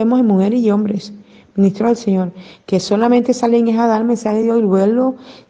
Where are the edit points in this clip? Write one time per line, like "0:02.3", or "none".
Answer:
none